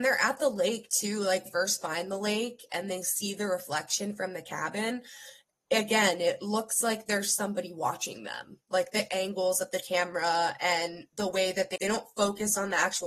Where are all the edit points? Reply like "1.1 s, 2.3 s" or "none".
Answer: 1.5 s, 11.8 s